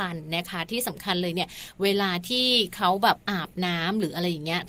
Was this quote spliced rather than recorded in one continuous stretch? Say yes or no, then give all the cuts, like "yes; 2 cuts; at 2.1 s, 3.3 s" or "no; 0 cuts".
yes; 1 cut; at 3.2 s